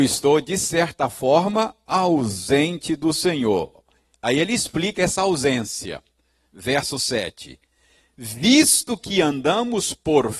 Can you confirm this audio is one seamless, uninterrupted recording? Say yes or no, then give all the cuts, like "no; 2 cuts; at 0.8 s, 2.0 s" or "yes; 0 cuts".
yes; 0 cuts